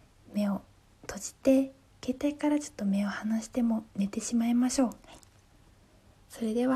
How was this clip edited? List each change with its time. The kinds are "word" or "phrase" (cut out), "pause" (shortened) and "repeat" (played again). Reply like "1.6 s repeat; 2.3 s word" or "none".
5.0 s pause